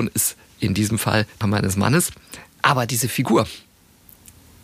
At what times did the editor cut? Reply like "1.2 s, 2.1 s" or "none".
1.4 s

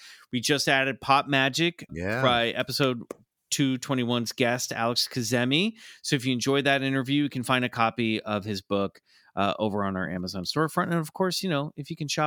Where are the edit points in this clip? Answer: 1.9 s

